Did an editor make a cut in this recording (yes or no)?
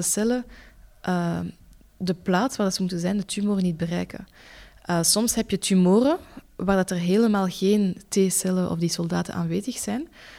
no